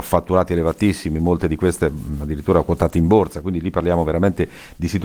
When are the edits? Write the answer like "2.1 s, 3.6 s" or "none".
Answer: none